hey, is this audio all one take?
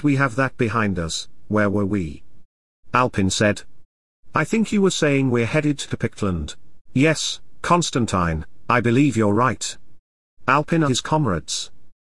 no; 2 cuts; at 6.8 s, 10.9 s

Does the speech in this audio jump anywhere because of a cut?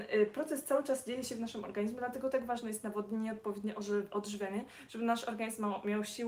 no; 0 cuts

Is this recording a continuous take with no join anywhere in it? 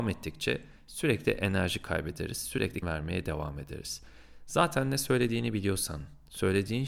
no; 1 cut; at 2.8 s

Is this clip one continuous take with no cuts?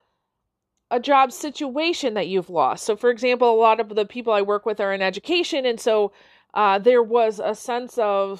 yes; 0 cuts

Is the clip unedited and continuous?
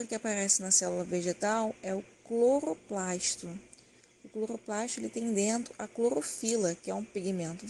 yes; 0 cuts

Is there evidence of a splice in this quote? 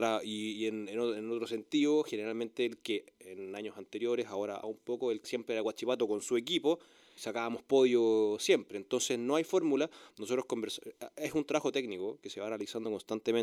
yes; 3 cuts; at 4.6 s, 5.2 s, 7.2 s

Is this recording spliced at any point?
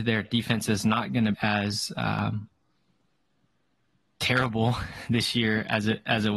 yes; 1 cut; at 1.3 s

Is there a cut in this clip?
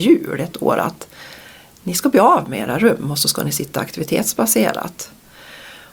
no; 0 cuts

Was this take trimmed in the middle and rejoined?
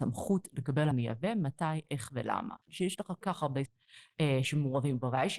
yes; 4 cuts; at 0.9 s, 2.6 s, 3.2 s, 3.7 s

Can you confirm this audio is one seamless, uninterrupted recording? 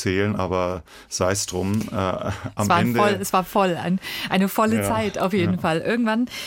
yes; 0 cuts

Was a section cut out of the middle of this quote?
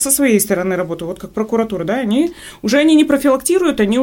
no; 0 cuts

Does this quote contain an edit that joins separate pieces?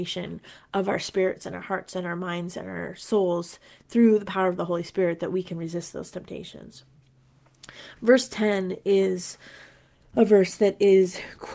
no; 0 cuts

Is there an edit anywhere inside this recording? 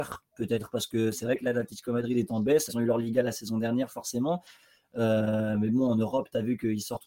yes; 1 cut; at 2.7 s

